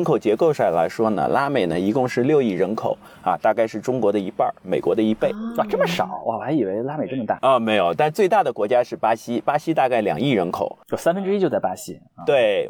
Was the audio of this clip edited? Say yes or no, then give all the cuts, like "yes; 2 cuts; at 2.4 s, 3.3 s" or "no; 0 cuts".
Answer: no; 0 cuts